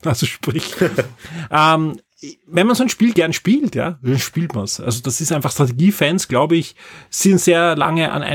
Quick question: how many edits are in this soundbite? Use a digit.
0